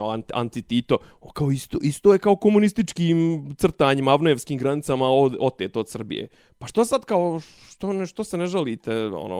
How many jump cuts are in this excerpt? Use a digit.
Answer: 0